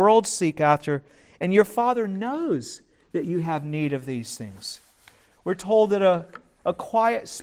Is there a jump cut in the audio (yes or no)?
no